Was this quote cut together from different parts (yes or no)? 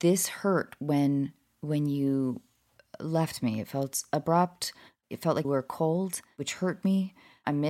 yes